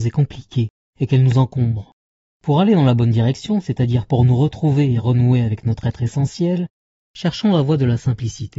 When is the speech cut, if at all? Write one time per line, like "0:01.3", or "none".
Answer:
none

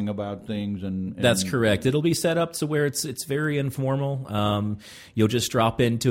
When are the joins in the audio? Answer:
none

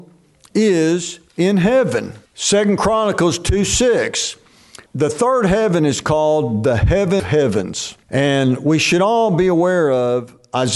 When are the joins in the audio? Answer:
0:01.3
0:02.3
0:04.9
0:07.2
0:08.0

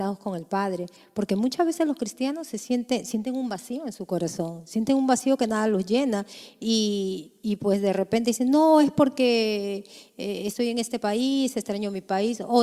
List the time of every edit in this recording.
none

